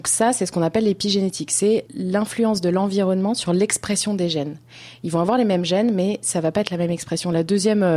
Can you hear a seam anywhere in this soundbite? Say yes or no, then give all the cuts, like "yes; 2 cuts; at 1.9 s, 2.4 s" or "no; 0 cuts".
yes; 1 cut; at 1.9 s